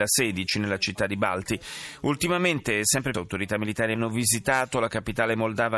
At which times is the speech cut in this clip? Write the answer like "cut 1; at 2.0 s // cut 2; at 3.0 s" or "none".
cut 1; at 3.1 s // cut 2; at 4.0 s